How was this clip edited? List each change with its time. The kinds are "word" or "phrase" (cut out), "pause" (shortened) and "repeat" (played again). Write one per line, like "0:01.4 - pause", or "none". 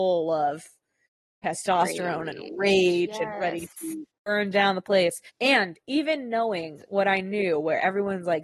0:04.1 - pause
0:05.3 - pause